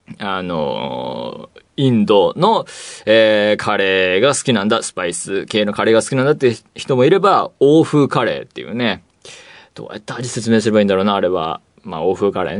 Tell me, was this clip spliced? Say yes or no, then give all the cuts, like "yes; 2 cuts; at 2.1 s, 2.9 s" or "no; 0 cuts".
no; 0 cuts